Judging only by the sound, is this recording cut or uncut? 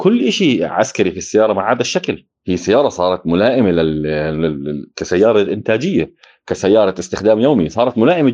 uncut